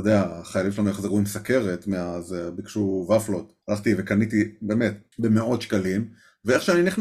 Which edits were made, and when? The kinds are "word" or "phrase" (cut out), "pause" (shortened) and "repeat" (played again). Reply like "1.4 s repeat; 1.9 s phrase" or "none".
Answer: 3.6 s pause; 5.1 s pause